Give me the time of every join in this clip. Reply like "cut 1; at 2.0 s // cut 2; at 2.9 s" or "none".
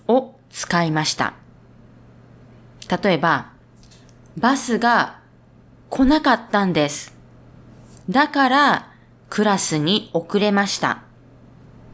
none

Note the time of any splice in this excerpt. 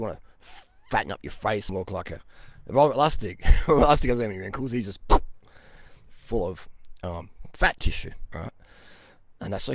cut 1; at 1.7 s

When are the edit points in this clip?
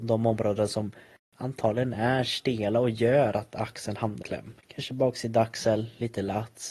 cut 1; at 4.2 s // cut 2; at 4.6 s

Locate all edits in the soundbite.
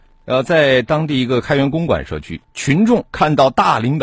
cut 1; at 2.4 s // cut 2; at 3.1 s

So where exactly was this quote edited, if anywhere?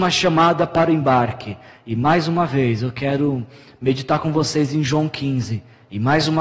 none

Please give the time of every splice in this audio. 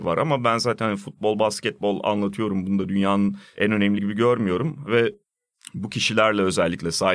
cut 1; at 4.0 s

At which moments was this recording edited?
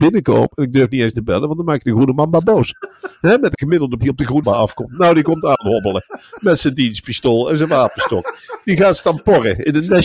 cut 1; at 1.1 s // cut 2; at 4.0 s // cut 3; at 4.4 s

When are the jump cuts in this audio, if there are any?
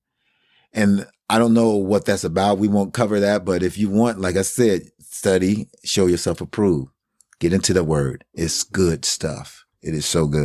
none

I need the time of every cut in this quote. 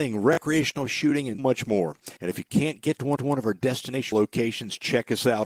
cut 1; at 1.4 s // cut 2; at 2.2 s // cut 3; at 3.2 s // cut 4; at 4.1 s

